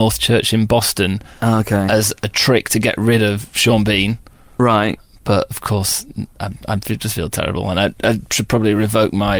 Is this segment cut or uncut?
uncut